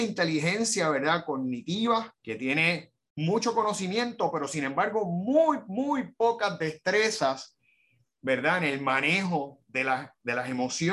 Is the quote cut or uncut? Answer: cut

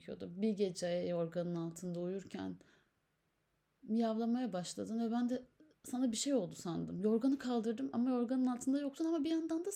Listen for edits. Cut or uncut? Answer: uncut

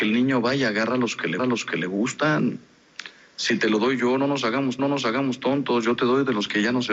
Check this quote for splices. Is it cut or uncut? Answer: cut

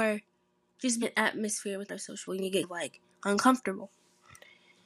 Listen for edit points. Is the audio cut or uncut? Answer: cut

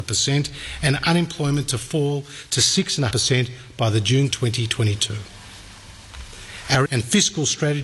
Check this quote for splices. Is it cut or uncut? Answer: cut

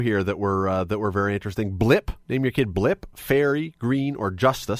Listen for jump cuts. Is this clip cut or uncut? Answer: cut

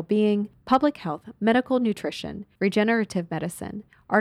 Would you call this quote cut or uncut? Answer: uncut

